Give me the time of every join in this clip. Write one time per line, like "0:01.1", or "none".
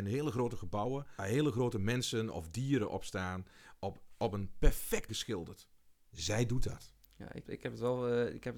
0:01.2
0:05.1
0:07.5